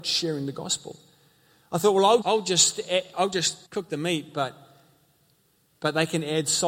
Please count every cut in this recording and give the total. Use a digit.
2